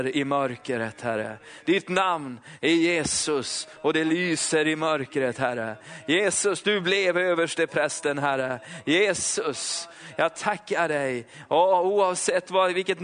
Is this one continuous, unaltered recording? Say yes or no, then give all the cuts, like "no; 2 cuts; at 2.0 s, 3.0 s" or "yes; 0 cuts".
yes; 0 cuts